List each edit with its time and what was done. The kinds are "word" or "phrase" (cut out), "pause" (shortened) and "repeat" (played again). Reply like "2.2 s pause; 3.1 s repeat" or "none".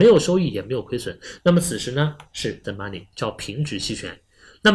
2.6 s word